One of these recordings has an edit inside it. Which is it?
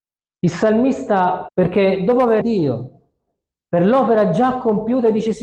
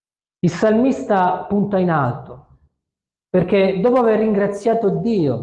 first; 2 cuts; at 1.5 s, 2.4 s

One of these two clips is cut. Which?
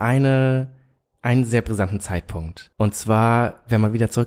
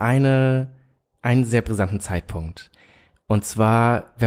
first; 1 cut; at 2.7 s

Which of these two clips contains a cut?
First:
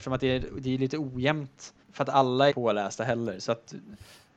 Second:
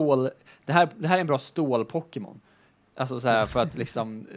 first; 2 cuts; at 1.8 s, 2.5 s

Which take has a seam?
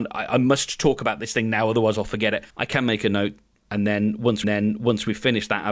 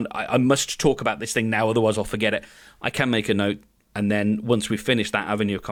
first; 2 cuts; at 2.5 s, 4.4 s

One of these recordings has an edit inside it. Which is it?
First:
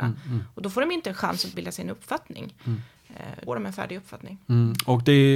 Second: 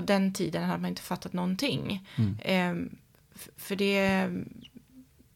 first; 2 cuts; at 1.5 s, 3.5 s

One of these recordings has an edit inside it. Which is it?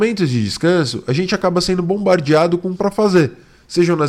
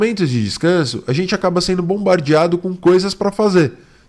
first; 1 cut; at 2.8 s

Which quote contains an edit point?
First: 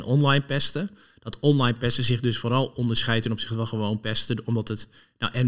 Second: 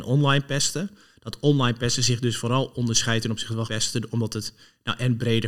second; 1 cut; at 3.7 s

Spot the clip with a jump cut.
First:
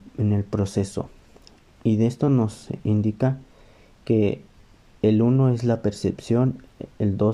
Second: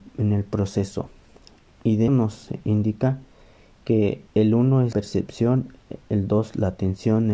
second; 3 cuts; at 2.1 s, 4.3 s, 4.9 s

